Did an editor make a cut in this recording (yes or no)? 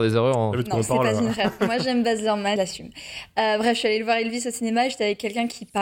yes